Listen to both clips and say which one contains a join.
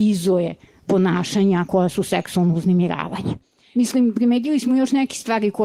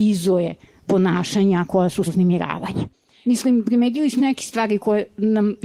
second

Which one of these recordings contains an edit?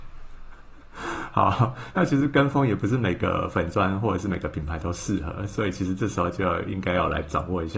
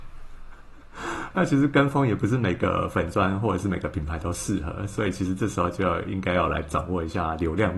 second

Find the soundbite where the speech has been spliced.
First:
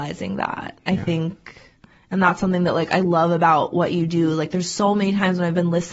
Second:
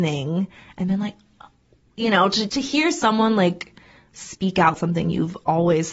second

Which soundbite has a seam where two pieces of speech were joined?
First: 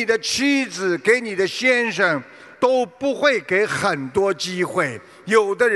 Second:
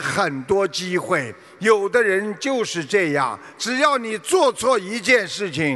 first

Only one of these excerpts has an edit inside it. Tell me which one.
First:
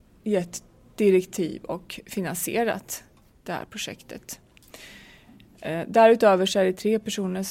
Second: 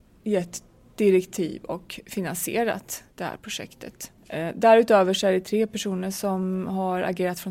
second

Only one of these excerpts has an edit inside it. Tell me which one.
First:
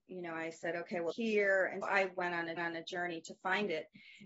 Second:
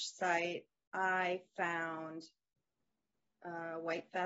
first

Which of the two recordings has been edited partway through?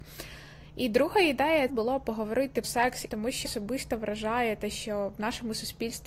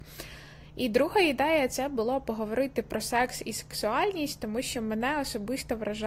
first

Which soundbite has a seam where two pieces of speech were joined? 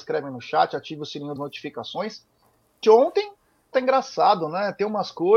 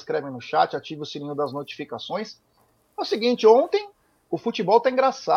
first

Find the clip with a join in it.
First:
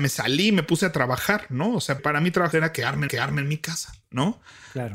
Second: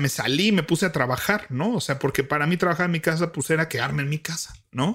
first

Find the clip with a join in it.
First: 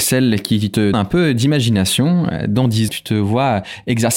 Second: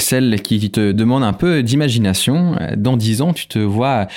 first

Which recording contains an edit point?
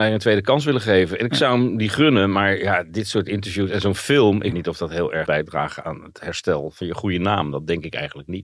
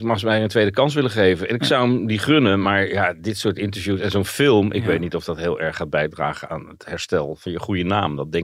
first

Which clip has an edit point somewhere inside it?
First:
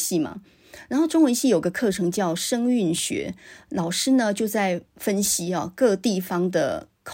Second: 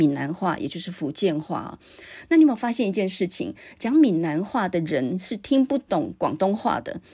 first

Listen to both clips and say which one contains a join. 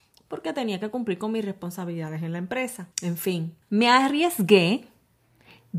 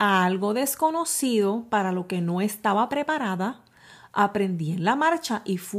first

